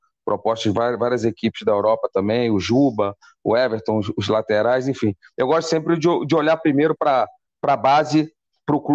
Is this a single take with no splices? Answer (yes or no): yes